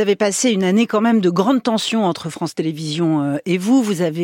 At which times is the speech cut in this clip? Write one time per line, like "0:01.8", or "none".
none